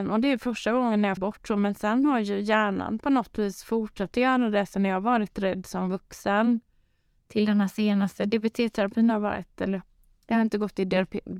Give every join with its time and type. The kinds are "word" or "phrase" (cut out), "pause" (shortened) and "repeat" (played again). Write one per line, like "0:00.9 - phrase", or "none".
0:01.2 - word